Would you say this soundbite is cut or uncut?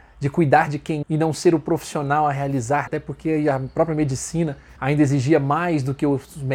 cut